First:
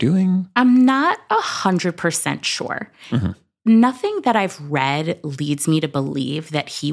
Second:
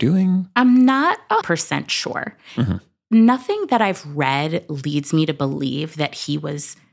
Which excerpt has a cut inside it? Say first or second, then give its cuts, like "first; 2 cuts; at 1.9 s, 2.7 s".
second; 1 cut; at 1.4 s